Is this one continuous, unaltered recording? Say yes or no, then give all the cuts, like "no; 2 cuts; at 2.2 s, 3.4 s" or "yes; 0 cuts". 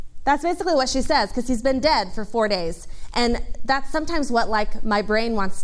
yes; 0 cuts